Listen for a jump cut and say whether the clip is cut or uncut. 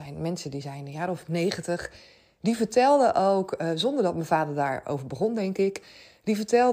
uncut